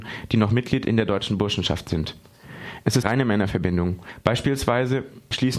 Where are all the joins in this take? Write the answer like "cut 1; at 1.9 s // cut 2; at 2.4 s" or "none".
cut 1; at 3.0 s